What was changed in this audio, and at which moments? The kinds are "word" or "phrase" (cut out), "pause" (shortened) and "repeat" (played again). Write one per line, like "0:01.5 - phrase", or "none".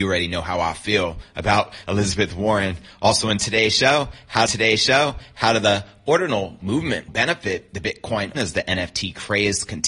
0:01.8 - word
0:04.5 - repeat
0:07.1 - word
0:08.3 - word